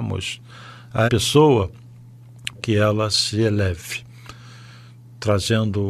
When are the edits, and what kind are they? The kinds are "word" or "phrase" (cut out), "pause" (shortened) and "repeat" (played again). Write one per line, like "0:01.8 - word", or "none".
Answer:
0:01.1 - word
0:02.5 - word